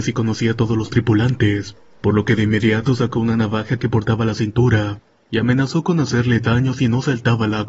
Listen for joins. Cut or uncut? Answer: uncut